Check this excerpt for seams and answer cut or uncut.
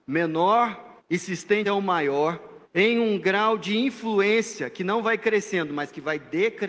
cut